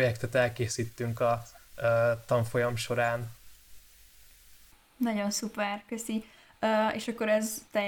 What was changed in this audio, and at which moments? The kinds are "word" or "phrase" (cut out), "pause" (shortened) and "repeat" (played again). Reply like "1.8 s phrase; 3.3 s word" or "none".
none